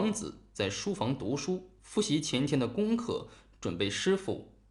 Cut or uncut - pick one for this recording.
uncut